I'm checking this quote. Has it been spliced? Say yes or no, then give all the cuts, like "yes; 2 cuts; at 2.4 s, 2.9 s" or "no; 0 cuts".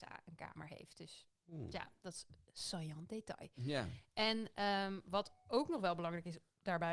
no; 0 cuts